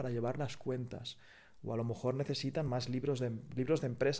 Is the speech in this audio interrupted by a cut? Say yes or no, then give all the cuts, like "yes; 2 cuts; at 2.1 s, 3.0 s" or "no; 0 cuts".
no; 0 cuts